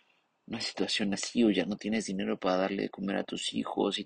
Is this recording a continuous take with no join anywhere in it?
yes; 0 cuts

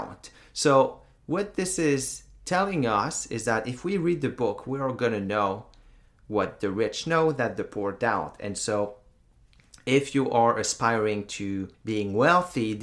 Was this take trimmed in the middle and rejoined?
yes; 1 cut; at 11.7 s

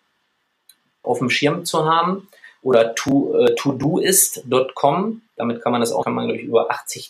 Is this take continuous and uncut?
no; 2 cuts; at 1.0 s, 6.0 s

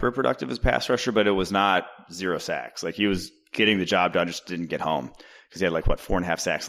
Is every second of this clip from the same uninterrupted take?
yes; 0 cuts

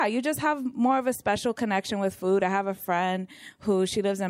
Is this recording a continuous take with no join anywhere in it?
yes; 0 cuts

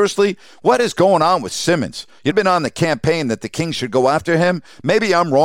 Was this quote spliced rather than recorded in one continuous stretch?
yes; 1 cut; at 2.3 s

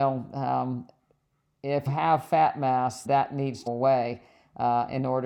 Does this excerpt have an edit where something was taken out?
yes; 3 cuts; at 1.9 s, 3.1 s, 3.7 s

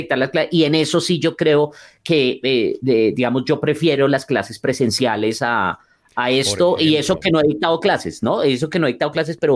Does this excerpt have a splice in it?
no; 0 cuts

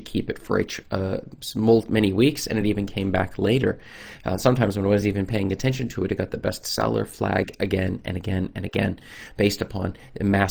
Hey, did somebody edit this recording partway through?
no; 0 cuts

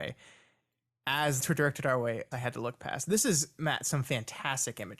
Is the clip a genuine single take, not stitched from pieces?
no; 2 cuts; at 1.4 s, 2.3 s

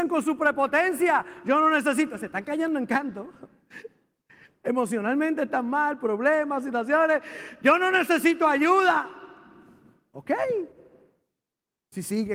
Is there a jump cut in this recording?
no; 0 cuts

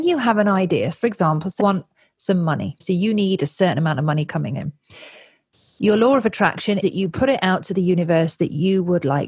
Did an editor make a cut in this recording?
yes; 3 cuts; at 1.6 s, 2.8 s, 6.8 s

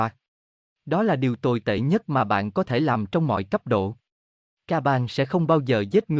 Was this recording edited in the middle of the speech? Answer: no; 0 cuts

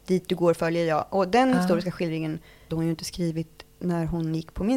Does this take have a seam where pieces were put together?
yes; 1 cut; at 2.7 s

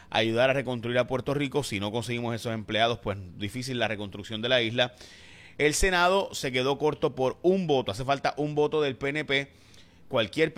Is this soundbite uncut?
yes; 0 cuts

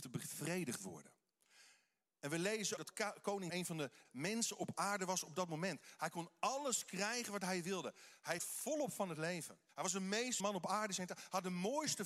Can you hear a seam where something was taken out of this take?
yes; 6 cuts; at 2.8 s, 3.5 s, 4.0 s, 8.4 s, 9.7 s, 10.4 s

